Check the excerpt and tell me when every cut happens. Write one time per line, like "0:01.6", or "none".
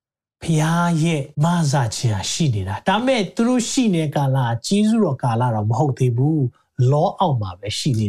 0:01.3